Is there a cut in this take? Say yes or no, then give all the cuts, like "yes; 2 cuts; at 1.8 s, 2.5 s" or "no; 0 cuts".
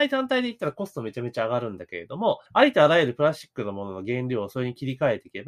yes; 1 cut; at 2.5 s